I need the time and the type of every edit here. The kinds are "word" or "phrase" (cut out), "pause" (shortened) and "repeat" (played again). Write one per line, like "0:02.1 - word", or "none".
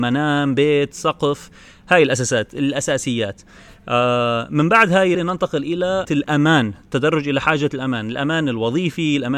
0:05.1 - word
0:06.0 - word